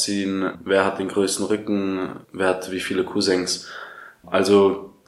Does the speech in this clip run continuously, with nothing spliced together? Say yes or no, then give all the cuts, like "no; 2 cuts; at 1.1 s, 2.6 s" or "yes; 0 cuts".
no; 1 cut; at 2.2 s